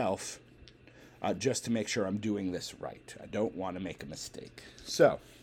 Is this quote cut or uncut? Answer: uncut